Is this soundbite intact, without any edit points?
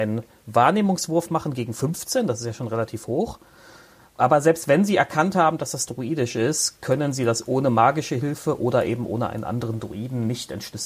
yes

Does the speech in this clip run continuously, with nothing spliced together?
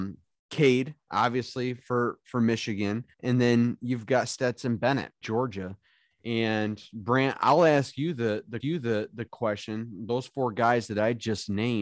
no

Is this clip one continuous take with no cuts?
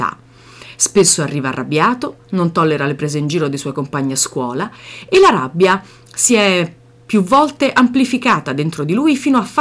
yes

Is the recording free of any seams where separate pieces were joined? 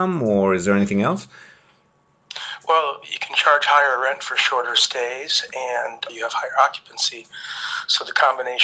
no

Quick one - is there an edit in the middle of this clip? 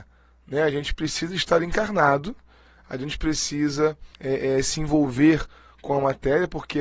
yes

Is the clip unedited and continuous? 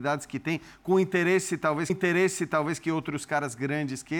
no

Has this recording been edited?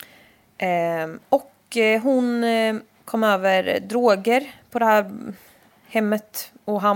no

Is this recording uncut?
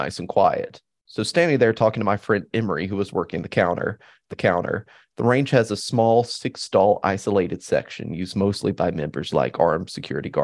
no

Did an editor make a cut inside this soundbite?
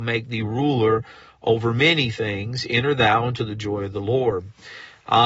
no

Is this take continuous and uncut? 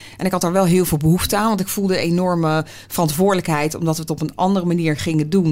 yes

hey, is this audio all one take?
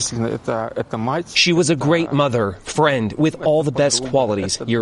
yes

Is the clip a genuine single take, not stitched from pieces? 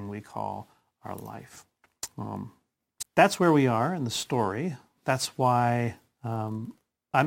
no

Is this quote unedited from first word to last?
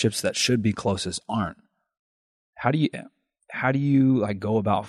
yes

